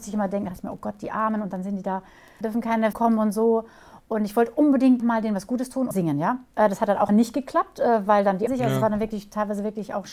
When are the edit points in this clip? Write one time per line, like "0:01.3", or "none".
0:02.4
0:02.9
0:05.0
0:05.9
0:06.5
0:07.1
0:08.5